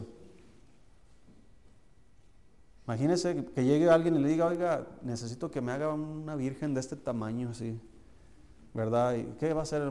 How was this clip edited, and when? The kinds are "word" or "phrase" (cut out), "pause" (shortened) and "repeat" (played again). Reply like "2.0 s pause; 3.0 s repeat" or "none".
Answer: none